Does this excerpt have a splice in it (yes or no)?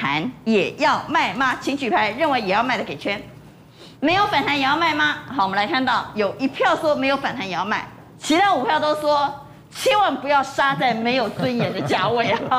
yes